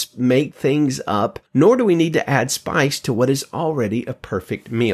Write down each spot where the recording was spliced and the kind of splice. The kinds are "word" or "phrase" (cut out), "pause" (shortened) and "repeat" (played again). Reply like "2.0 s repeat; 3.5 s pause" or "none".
1.5 s pause